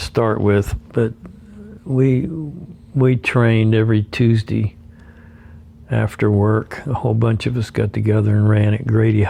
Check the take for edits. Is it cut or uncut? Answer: uncut